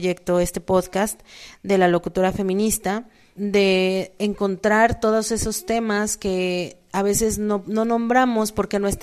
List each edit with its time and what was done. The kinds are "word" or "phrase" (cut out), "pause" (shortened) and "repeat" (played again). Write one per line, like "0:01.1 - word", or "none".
0:03.4 - word